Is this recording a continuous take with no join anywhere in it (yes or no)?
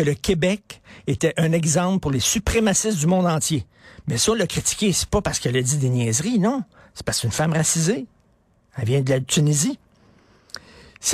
yes